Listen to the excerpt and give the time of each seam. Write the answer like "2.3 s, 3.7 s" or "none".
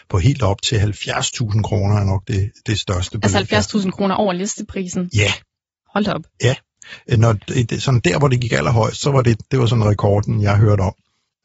none